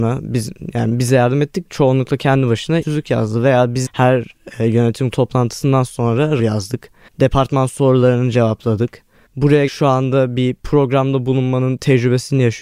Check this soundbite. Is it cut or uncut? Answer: cut